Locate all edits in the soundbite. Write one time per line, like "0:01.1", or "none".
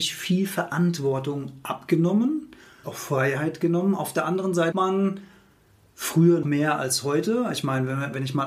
0:02.8
0:04.7
0:06.4